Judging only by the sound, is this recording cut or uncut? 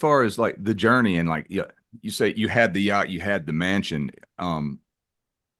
uncut